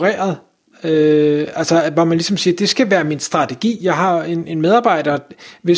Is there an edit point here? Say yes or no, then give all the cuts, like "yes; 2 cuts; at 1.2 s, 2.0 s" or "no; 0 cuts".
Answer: no; 0 cuts